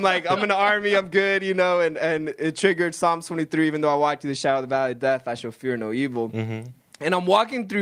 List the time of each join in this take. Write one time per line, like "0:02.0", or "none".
none